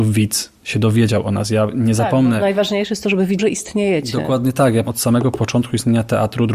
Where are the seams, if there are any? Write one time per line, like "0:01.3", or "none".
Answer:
0:03.4
0:04.9